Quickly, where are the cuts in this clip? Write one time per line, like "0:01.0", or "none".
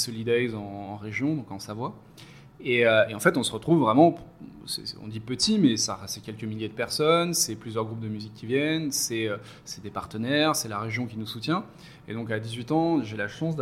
none